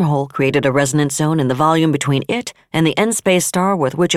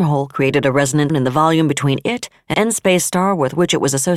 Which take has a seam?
second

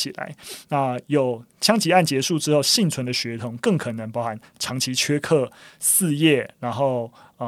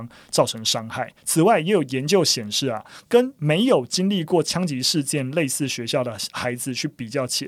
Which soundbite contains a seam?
second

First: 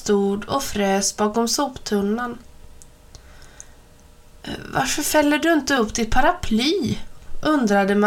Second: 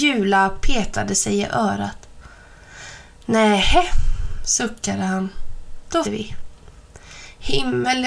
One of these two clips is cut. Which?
second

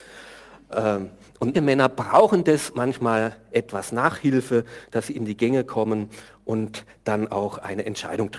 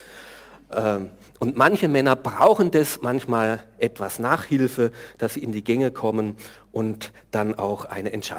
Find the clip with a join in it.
first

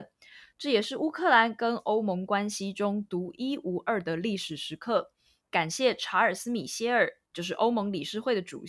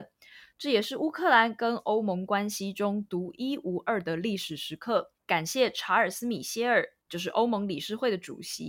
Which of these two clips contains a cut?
second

